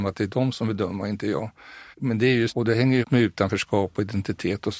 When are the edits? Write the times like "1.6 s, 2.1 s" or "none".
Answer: 1.9 s, 2.5 s, 3.0 s